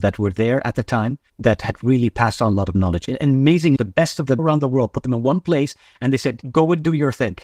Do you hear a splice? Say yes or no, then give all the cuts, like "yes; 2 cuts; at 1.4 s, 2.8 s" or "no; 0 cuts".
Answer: yes; 3 cuts; at 1.3 s, 3.8 s, 4.4 s